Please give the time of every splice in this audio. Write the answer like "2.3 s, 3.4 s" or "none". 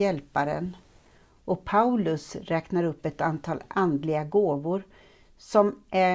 none